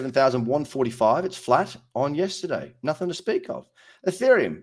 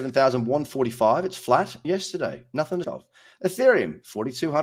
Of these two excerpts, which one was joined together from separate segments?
second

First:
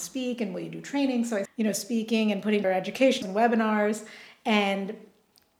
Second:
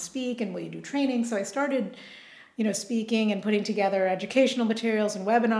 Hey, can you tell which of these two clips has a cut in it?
first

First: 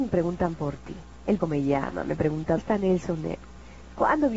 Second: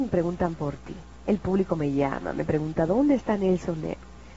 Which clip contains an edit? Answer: first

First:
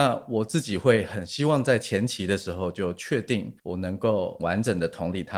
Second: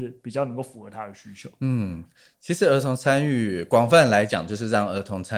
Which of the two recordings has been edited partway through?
first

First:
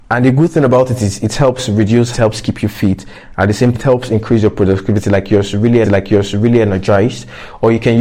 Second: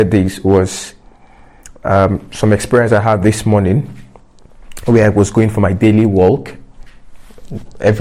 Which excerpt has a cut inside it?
first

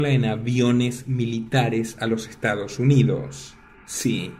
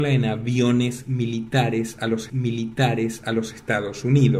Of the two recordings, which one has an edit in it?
second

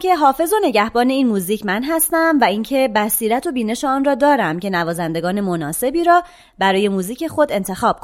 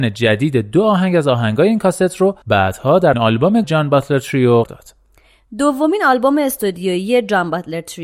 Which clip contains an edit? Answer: second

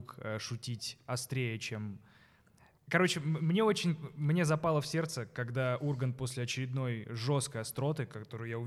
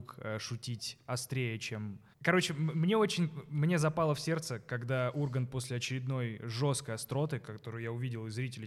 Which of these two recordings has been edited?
second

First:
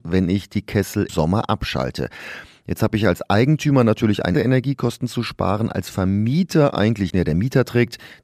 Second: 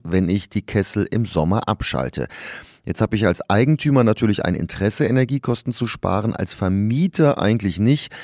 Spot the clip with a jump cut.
first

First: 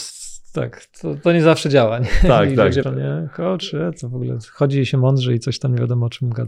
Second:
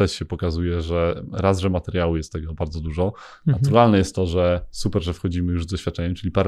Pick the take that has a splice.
first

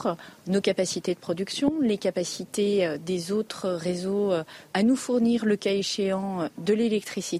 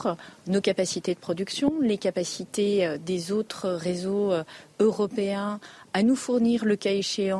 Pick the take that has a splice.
first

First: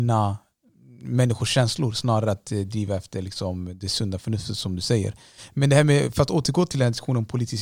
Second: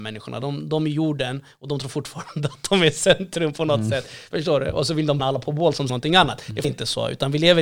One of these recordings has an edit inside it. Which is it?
second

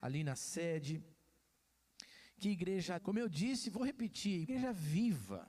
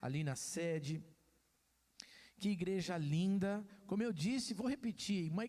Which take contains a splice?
first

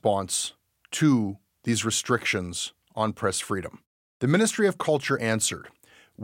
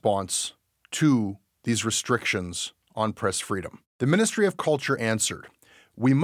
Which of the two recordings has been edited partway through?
second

